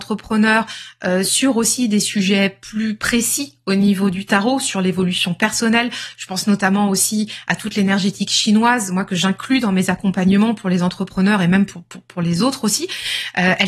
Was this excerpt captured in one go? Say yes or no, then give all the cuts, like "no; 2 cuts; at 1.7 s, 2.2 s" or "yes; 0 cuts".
yes; 0 cuts